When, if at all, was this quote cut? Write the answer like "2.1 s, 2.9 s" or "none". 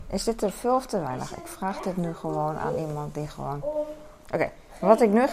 none